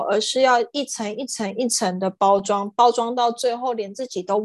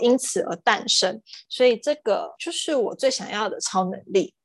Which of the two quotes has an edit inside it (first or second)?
second